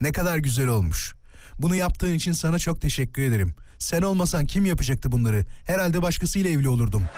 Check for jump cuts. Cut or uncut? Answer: uncut